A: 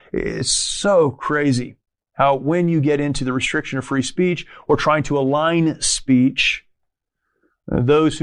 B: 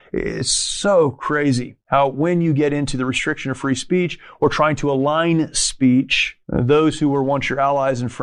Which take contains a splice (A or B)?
B